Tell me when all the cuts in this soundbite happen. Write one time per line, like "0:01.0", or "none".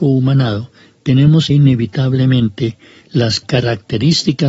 0:01.5